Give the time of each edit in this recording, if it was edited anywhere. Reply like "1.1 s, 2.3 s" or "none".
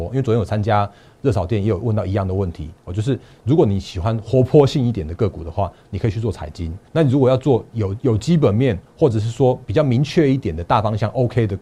6.9 s